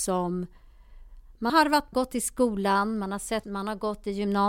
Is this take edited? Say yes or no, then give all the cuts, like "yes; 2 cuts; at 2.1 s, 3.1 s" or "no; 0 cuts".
yes; 3 cuts; at 1.5 s, 1.9 s, 3.4 s